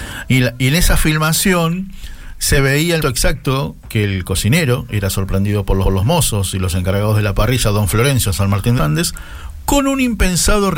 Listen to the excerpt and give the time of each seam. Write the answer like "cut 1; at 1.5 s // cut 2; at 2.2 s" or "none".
cut 1; at 3.0 s // cut 2; at 5.8 s // cut 3; at 8.8 s